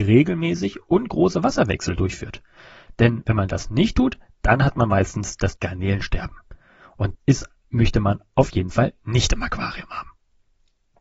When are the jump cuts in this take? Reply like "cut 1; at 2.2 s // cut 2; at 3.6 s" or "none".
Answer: cut 1; at 5.6 s // cut 2; at 7.1 s